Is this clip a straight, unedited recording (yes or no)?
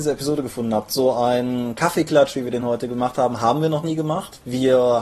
yes